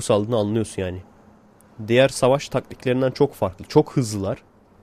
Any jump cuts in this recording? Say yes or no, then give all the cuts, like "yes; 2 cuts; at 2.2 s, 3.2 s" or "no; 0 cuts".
no; 0 cuts